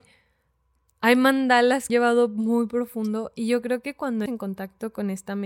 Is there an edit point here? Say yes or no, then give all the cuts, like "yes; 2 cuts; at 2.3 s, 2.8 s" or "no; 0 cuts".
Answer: yes; 2 cuts; at 1.9 s, 4.3 s